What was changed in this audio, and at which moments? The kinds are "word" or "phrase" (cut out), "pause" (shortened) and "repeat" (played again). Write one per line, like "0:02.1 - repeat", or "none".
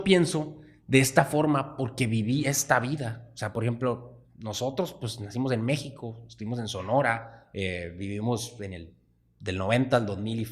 none